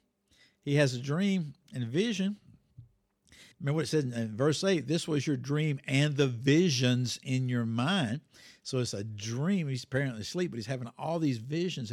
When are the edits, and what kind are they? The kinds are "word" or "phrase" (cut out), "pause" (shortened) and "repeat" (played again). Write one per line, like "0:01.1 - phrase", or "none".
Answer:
0:03.5 - pause